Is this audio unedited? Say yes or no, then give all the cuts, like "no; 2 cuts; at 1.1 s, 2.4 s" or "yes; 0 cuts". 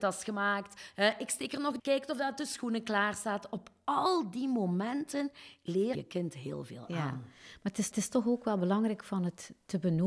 no; 3 cuts; at 1.8 s, 5.9 s, 7.9 s